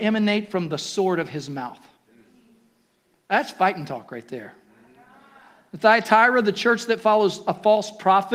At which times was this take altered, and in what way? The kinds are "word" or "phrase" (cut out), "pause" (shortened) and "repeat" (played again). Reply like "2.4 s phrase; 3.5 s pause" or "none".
none